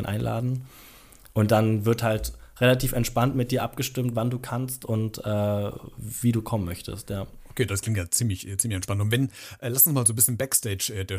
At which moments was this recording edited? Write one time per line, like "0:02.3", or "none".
none